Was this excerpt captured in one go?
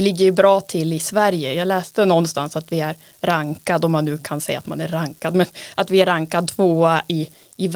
yes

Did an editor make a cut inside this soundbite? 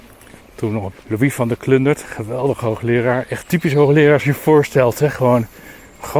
yes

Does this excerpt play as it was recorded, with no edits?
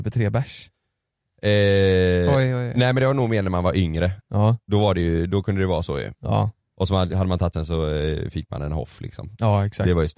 no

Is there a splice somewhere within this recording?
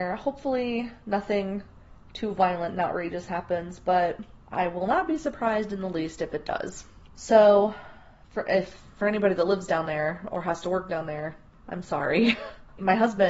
no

